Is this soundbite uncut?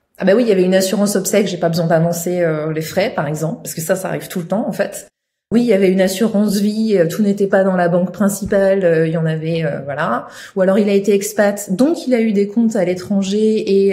yes; 0 cuts

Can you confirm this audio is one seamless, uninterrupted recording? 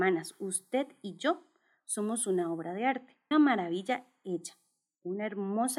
no; 1 cut; at 3.3 s

